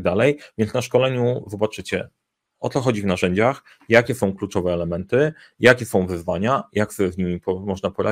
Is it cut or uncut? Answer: uncut